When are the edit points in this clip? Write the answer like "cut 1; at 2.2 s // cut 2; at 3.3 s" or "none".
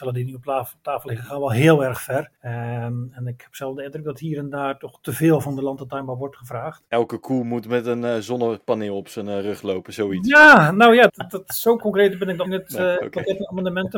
cut 1; at 2.4 s // cut 2; at 6.9 s // cut 3; at 11.1 s // cut 4; at 12.4 s